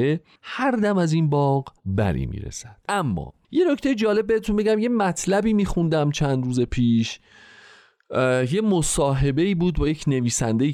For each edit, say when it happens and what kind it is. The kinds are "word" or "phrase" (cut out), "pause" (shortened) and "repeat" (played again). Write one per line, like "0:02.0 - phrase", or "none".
0:01.8 - pause
0:02.8 - pause